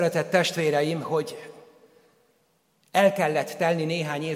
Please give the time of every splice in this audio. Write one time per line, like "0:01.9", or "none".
none